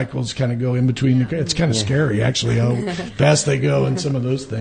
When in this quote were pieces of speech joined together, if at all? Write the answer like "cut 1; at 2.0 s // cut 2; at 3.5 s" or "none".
none